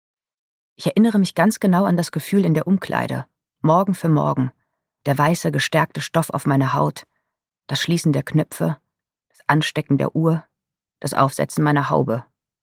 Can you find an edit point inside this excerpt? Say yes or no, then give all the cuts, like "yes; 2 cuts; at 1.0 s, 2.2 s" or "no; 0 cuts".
no; 0 cuts